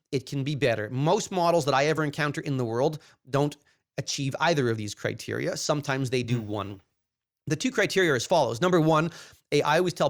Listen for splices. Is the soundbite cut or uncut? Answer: uncut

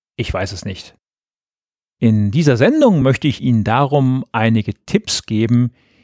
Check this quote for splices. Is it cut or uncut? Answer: uncut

